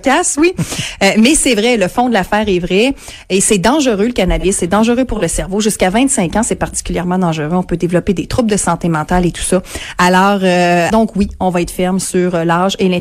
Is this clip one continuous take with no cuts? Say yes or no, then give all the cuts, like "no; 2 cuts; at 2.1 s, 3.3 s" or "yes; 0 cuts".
no; 1 cut; at 10.9 s